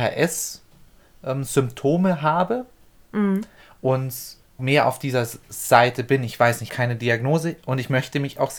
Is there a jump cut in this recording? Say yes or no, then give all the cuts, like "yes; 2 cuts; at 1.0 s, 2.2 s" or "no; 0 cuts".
yes; 2 cuts; at 4.6 s, 6.7 s